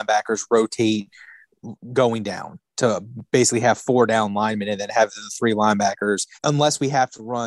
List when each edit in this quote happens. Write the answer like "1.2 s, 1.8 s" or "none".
6.4 s